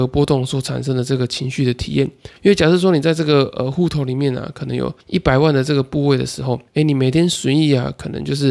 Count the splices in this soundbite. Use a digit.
3